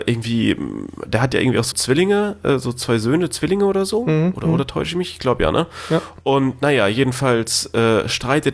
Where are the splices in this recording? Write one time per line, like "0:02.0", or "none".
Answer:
0:01.7